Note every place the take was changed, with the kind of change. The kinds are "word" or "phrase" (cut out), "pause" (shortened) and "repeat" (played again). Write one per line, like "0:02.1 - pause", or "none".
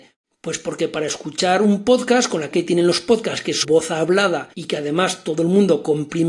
0:02.5 - word
0:03.6 - word
0:04.5 - pause